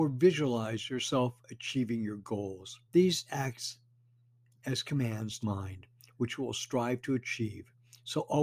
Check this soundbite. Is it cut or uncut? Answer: cut